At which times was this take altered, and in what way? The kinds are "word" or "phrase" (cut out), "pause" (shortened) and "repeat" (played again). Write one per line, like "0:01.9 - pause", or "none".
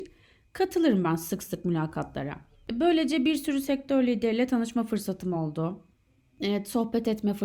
none